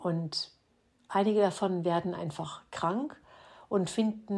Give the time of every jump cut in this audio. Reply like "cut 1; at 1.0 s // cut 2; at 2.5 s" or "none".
none